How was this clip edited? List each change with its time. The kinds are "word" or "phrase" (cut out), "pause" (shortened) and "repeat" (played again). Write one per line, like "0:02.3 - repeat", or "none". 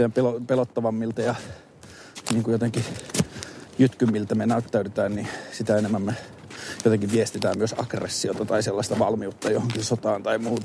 none